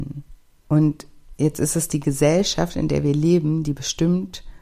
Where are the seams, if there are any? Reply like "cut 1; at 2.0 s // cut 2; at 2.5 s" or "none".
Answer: none